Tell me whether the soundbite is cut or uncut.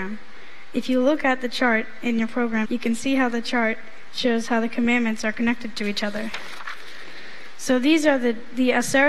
cut